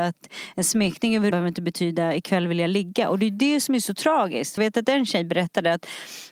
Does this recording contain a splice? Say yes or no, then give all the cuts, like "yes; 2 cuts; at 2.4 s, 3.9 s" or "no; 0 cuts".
yes; 2 cuts; at 1.3 s, 4.6 s